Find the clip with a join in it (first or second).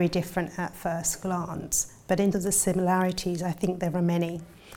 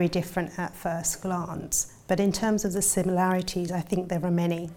first